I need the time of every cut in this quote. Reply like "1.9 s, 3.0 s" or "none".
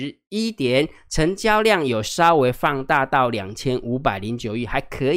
none